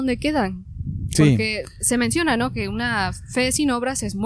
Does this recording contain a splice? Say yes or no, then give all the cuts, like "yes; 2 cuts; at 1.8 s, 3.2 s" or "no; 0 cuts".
no; 0 cuts